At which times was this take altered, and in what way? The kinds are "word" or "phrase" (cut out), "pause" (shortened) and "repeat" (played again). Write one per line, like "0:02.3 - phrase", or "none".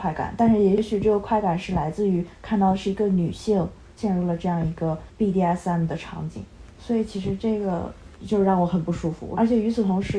0:05.1 - pause

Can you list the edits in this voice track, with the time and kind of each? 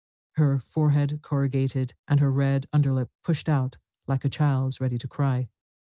0:02.0 - pause

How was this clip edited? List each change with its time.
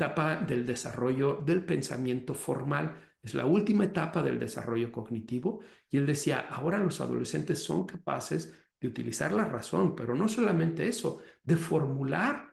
none

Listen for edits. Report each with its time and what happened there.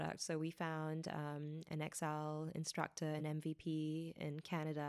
none

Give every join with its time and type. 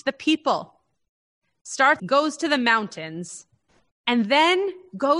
0:02.0 - phrase

